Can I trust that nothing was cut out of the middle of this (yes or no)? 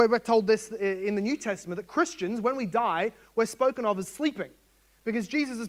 yes